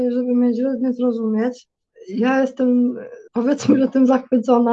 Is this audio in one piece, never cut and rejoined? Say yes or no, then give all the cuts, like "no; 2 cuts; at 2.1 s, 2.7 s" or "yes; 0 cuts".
no; 1 cut; at 3.3 s